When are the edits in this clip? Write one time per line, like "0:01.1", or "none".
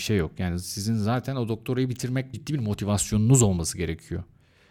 0:02.3